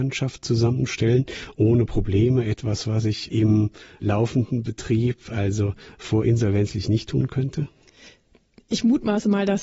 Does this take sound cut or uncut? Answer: uncut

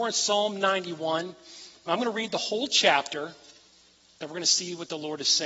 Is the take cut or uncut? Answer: uncut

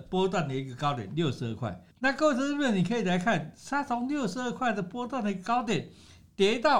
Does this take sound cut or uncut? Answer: cut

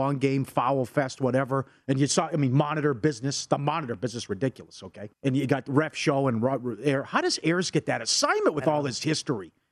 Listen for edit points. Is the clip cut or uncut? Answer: cut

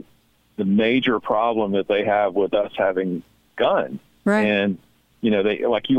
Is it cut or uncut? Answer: uncut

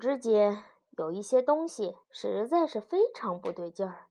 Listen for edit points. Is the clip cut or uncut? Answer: cut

